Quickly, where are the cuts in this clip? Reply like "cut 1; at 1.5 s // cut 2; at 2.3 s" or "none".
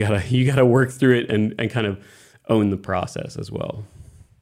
none